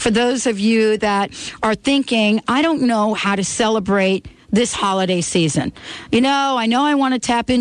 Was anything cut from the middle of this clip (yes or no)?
no